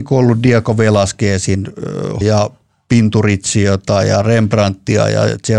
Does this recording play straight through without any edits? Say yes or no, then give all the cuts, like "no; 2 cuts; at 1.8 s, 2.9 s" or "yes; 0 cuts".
no; 1 cut; at 2.2 s